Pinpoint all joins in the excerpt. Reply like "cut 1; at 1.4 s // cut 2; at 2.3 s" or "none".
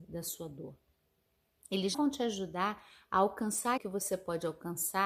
cut 1; at 1.9 s // cut 2; at 3.8 s